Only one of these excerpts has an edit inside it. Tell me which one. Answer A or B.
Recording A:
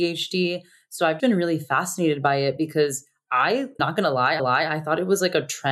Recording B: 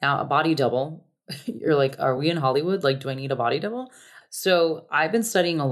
A